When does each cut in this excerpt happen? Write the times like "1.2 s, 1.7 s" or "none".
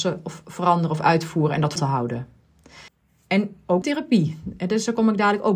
1.8 s, 2.9 s, 3.8 s